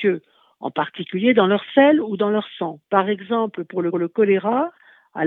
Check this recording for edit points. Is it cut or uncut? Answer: cut